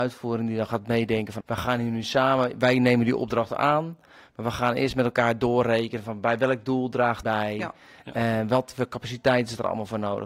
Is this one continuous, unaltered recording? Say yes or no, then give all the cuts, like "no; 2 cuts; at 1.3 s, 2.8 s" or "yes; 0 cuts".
no; 2 cuts; at 1.4 s, 7.2 s